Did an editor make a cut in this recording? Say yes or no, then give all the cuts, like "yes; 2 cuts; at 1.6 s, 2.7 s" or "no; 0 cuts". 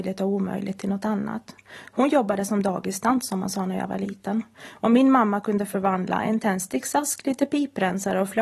no; 0 cuts